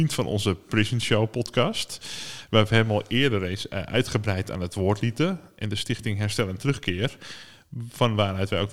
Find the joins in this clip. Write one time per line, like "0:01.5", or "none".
none